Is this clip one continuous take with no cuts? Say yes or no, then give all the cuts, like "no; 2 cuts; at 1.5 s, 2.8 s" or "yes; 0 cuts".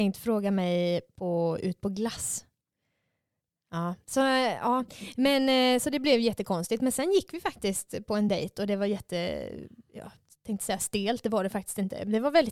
yes; 0 cuts